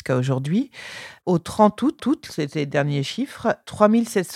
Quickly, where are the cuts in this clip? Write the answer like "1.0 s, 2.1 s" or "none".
2.0 s